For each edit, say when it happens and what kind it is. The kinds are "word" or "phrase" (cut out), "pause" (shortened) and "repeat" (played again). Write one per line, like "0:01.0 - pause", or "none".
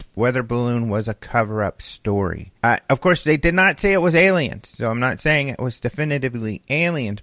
0:02.6 - pause

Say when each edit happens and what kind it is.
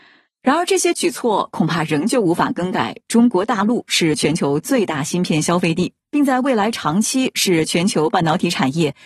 0:06.0 - pause

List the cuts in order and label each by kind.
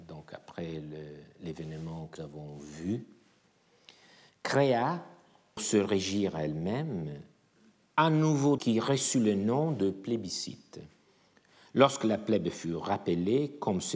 0:02.2 - word
0:05.6 - word
0:08.6 - word

